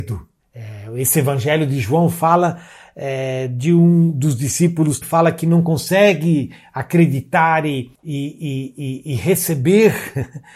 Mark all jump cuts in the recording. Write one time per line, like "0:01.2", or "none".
0:05.0
0:07.9